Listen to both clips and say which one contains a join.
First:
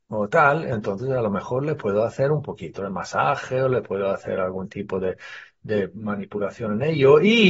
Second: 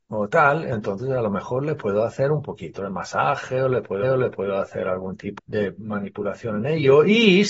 second; 2 cuts; at 4.0 s, 5.4 s

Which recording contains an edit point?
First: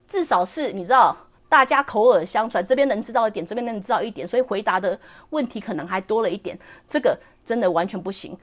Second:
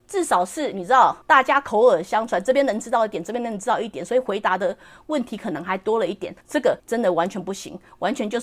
second; 3 cuts; at 1.2 s, 6.4 s, 6.8 s

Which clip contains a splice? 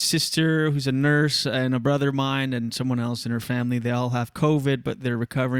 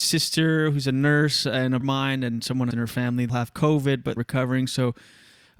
second; 4 cuts; at 1.8 s, 2.7 s, 3.3 s, 4.2 s

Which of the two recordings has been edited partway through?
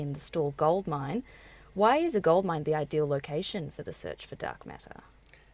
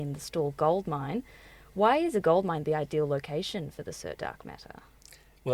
second; 1 cut; at 4.2 s

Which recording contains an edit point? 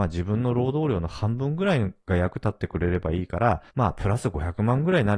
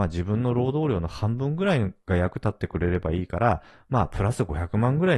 first; 1 cut; at 3.7 s

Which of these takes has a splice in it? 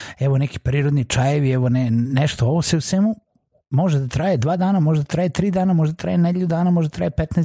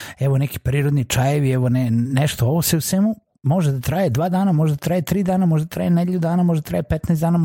second; 1 cut; at 3.4 s

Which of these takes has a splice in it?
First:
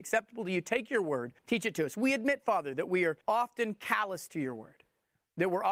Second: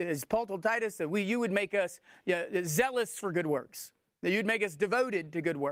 first; 2 cuts; at 1.4 s, 3.2 s

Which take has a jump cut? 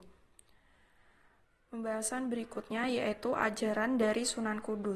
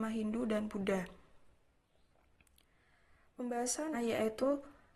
second; 1 cut; at 3.9 s

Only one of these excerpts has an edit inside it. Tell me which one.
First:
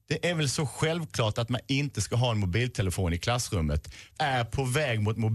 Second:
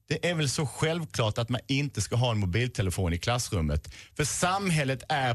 first; 1 cut; at 4.2 s

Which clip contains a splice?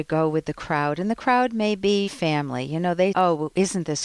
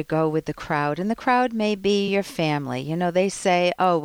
first; 2 cuts; at 2.1 s, 3.1 s

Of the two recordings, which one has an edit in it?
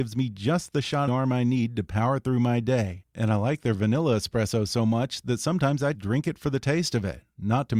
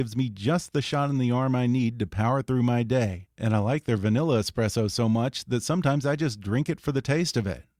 first; 2 cuts; at 1.1 s, 5.9 s

